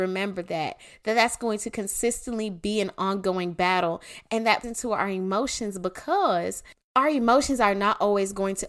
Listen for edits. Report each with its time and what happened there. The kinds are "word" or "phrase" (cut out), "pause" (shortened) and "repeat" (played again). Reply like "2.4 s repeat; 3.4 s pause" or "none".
4.6 s word